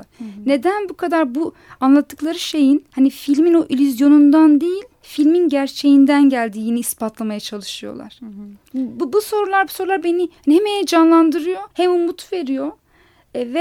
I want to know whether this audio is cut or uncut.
cut